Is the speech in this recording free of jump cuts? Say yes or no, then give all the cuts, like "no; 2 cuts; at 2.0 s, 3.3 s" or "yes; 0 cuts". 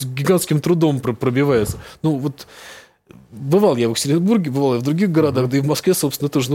yes; 0 cuts